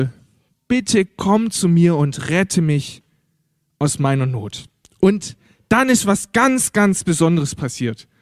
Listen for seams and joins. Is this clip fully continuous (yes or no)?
yes